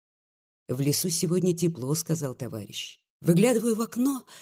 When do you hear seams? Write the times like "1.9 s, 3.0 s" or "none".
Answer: 3.1 s